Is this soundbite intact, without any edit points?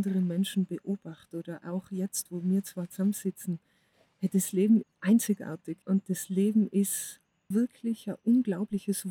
no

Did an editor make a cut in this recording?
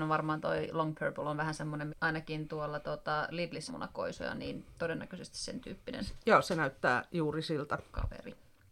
yes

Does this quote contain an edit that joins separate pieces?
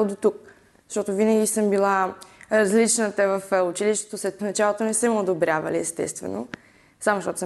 yes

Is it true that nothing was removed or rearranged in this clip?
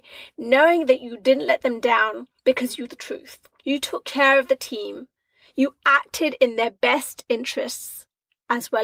no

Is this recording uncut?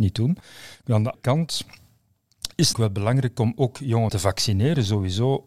no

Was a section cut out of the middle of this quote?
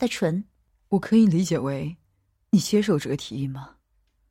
no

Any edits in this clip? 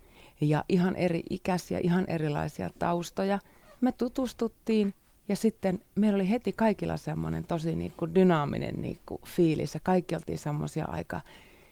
no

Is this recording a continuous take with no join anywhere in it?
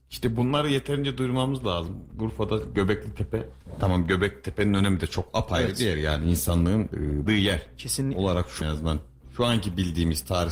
no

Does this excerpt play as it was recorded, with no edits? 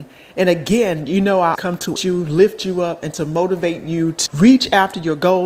no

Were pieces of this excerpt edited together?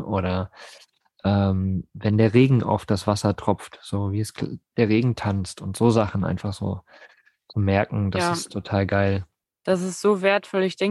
no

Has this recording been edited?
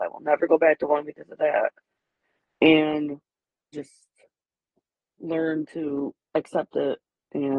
yes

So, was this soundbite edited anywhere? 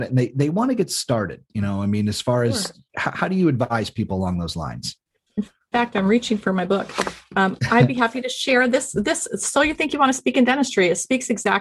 no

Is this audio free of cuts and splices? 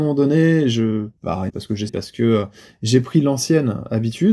no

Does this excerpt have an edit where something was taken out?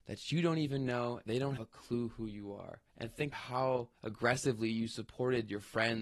yes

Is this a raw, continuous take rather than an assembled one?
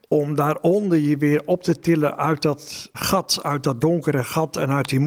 no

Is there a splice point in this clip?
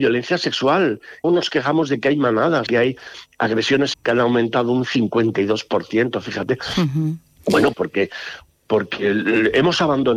yes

